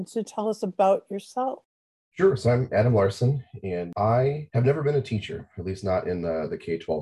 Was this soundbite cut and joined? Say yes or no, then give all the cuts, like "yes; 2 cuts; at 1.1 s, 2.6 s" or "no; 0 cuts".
no; 0 cuts